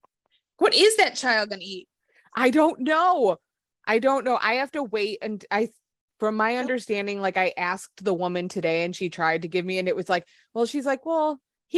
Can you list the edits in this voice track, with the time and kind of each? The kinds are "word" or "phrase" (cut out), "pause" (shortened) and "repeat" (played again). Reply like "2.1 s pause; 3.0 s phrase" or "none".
none